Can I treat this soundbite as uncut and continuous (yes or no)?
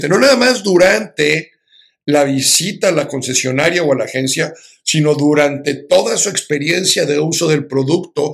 yes